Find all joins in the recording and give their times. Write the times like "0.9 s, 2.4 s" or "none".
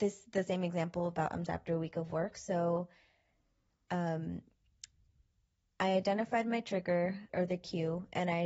1.5 s, 7.3 s